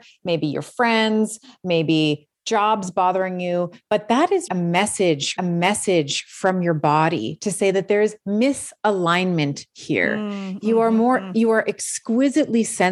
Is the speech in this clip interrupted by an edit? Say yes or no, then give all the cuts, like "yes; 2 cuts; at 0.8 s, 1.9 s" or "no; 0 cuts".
yes; 2 cuts; at 4.5 s, 5.4 s